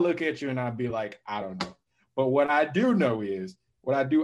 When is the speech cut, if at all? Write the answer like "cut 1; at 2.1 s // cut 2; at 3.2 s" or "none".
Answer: none